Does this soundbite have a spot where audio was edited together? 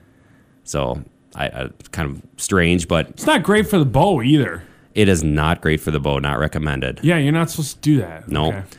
no; 0 cuts

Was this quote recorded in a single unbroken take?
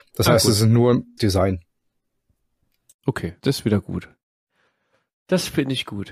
no; 2 cuts; at 1.2 s, 3.4 s

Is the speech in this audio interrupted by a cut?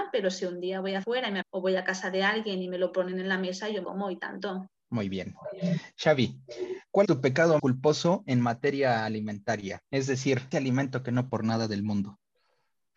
yes; 9 cuts; at 1.0 s, 1.4 s, 3.8 s, 4.8 s, 7.0 s, 7.6 s, 9.9 s, 10.5 s, 11.3 s

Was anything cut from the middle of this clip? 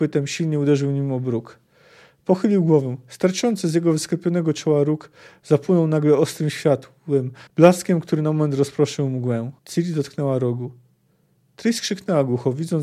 yes; 2 cuts; at 7.5 s, 9.6 s

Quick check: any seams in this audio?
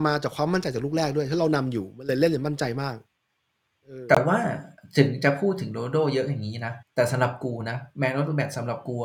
yes; 2 cuts; at 4.8 s, 6.8 s

